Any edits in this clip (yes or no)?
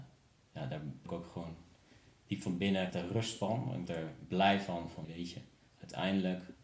yes